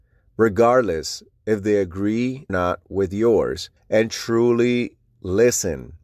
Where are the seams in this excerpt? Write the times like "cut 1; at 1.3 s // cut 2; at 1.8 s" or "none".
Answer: cut 1; at 2.5 s // cut 2; at 3.8 s

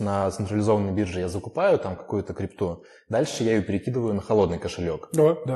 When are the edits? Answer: none

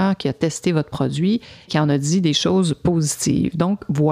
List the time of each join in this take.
cut 1; at 1.7 s

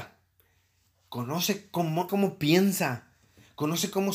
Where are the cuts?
cut 1; at 2.1 s

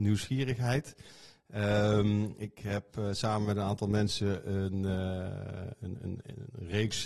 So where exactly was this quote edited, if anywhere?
none

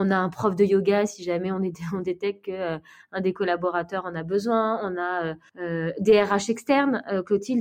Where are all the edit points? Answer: cut 1; at 5.5 s

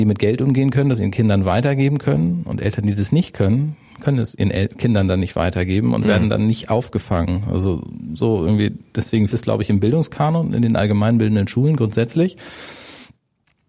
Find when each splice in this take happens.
cut 1; at 9.3 s

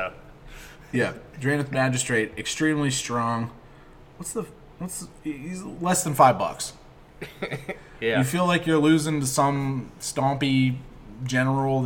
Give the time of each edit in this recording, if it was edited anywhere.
none

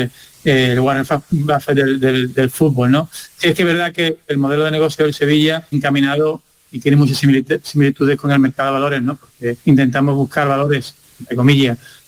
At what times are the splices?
cut 1; at 5.7 s // cut 2; at 9.6 s

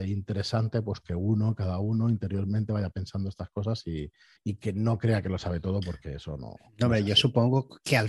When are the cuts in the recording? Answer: cut 1; at 4.4 s

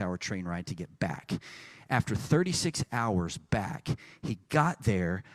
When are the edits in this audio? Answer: none

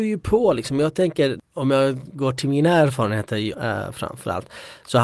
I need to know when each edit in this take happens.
cut 1; at 3.5 s

